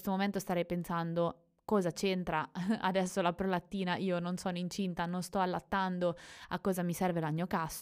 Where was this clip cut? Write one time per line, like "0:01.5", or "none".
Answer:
none